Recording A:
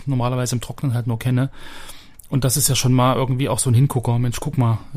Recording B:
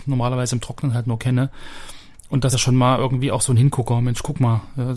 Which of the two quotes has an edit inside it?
B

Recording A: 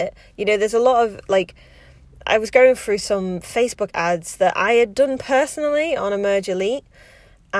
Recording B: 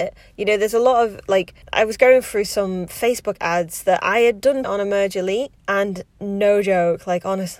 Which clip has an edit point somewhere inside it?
B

